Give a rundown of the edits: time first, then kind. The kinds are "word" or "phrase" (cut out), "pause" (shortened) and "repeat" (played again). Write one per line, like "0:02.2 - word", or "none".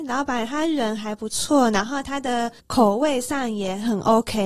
0:02.6 - pause